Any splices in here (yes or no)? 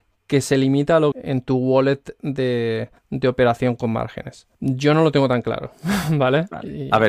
yes